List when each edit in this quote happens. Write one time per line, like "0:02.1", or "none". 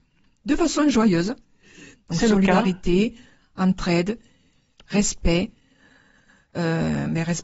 none